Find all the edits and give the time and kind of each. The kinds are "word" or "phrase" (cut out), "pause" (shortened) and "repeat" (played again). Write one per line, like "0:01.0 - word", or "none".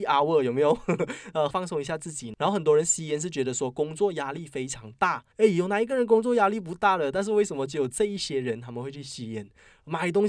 0:01.5 - phrase
0:05.3 - pause